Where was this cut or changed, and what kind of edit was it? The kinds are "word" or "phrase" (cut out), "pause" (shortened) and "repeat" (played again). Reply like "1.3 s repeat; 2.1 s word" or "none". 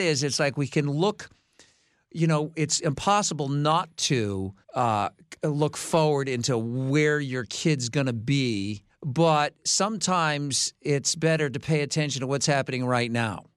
4.6 s pause; 8.9 s pause